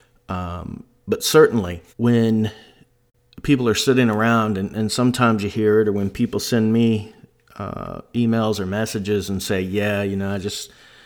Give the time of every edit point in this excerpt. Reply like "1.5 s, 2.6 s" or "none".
1.9 s